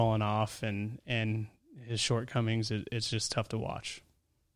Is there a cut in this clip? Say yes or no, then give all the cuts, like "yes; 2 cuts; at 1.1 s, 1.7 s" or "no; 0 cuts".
no; 0 cuts